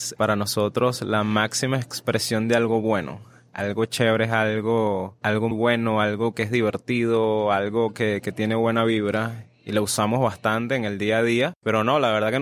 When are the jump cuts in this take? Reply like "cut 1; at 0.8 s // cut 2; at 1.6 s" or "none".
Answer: cut 1; at 5.5 s